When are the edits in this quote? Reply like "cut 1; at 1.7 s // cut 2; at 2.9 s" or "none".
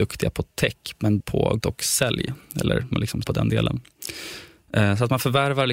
cut 1; at 1.2 s // cut 2; at 1.6 s // cut 3; at 2.9 s // cut 4; at 3.2 s